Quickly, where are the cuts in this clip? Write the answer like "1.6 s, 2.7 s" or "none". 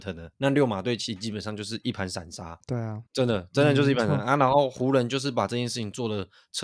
3.1 s